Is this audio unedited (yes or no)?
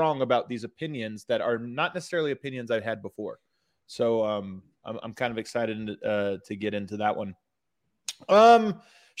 yes